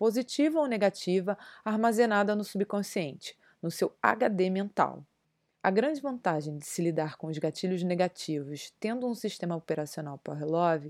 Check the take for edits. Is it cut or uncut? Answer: cut